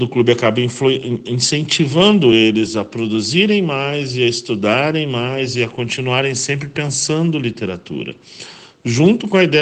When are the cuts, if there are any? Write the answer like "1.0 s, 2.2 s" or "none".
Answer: none